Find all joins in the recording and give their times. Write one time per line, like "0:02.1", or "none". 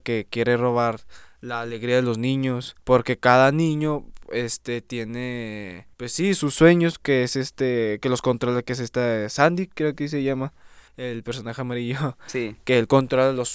0:02.8
0:05.9
0:10.9